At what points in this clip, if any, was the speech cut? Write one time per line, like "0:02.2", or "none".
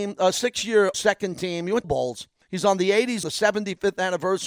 0:00.9
0:01.8
0:02.4
0:03.2